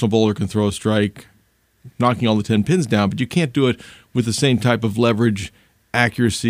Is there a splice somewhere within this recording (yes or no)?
no